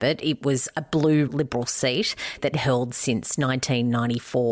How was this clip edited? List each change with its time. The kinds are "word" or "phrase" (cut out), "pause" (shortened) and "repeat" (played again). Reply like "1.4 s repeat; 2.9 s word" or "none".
1.3 s word; 2.5 s word